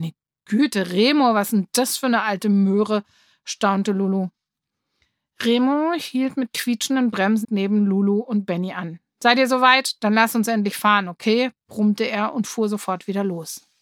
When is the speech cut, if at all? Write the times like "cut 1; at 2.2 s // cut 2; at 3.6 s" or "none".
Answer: cut 1; at 7.4 s

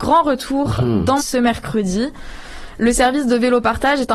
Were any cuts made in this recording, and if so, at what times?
cut 1; at 1.2 s

